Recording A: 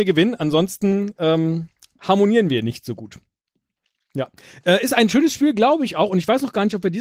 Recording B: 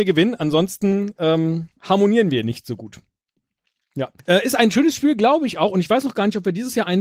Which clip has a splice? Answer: B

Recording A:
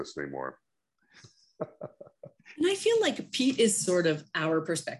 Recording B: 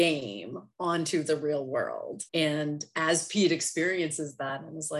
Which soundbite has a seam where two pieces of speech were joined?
B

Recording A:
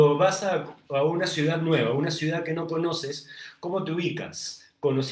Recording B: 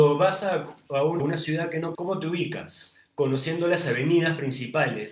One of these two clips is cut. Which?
B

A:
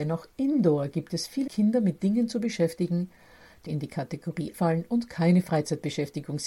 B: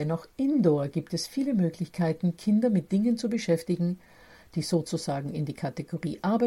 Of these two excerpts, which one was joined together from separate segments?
A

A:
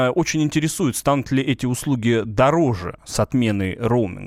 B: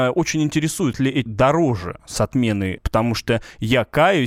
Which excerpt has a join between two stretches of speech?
B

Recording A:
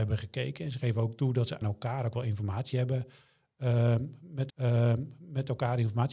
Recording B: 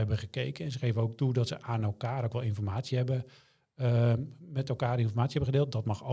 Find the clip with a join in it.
A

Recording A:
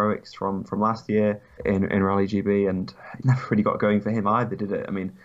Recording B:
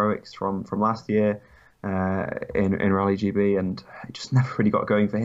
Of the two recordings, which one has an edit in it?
A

